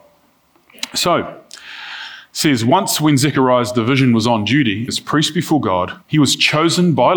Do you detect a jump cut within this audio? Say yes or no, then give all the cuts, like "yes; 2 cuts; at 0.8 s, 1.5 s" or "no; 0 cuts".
yes; 2 cuts; at 4.9 s, 6.0 s